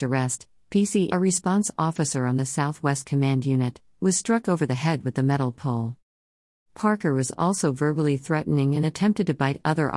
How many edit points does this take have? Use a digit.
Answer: 1